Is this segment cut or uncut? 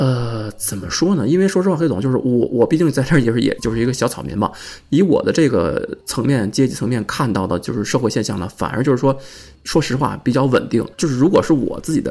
cut